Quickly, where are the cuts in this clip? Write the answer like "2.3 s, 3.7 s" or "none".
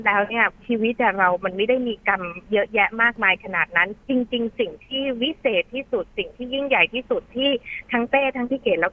4.0 s